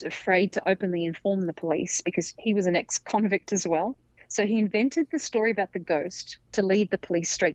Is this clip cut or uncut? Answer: cut